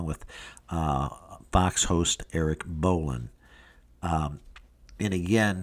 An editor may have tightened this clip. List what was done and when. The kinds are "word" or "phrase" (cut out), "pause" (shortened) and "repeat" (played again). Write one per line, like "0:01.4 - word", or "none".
none